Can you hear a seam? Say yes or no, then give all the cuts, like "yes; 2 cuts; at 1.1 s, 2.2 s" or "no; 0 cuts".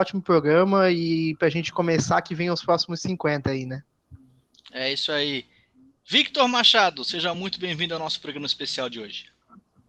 no; 0 cuts